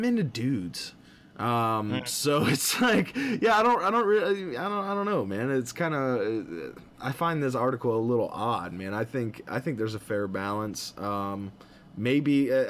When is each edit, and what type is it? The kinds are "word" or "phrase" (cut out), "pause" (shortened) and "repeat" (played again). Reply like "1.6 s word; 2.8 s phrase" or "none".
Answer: none